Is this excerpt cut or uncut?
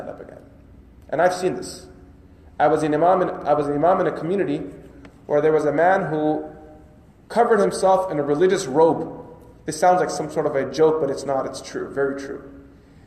uncut